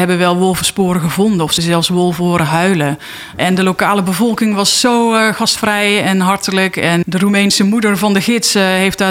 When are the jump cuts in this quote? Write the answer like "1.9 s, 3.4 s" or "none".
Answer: 1.6 s, 7.0 s